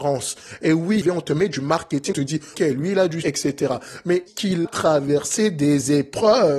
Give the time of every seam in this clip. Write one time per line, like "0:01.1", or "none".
0:01.0
0:02.1
0:02.5
0:03.2
0:04.3
0:04.6